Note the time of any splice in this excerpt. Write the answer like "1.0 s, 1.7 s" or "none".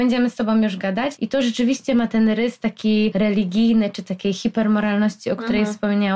none

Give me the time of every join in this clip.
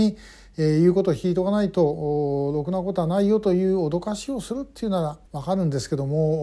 5.3 s

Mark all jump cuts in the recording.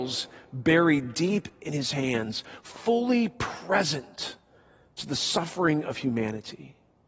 none

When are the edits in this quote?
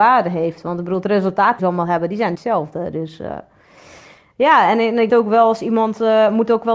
1.6 s, 2.3 s, 5.1 s

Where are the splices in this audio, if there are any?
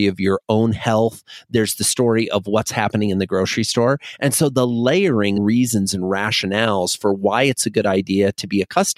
5.4 s

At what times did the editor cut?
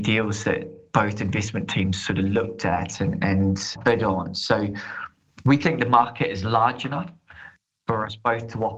none

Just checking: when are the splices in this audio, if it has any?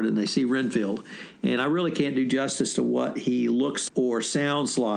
3.9 s

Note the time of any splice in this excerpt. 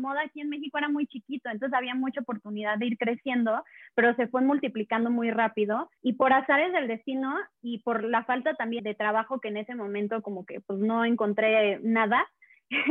6.0 s, 7.6 s, 8.8 s

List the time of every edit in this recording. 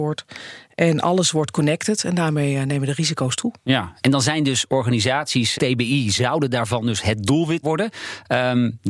3.6 s, 5.5 s, 7.6 s

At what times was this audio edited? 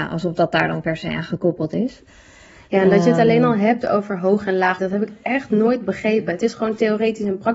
4.8 s

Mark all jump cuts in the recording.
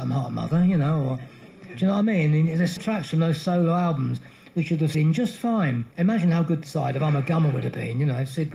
2.8 s, 4.9 s, 5.9 s, 6.6 s

